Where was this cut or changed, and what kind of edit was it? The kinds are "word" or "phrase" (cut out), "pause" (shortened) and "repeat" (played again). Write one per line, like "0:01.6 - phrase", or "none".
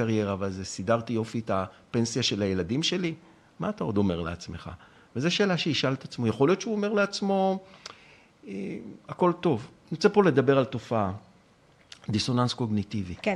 none